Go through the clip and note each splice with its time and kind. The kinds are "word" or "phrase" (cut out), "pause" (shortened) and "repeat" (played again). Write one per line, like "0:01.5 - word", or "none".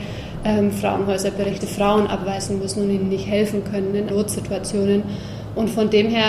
0:01.6 - word
0:04.1 - word